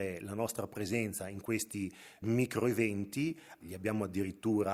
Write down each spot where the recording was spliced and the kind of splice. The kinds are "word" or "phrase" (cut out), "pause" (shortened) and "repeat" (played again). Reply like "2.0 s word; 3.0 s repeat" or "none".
2.2 s word; 3.6 s word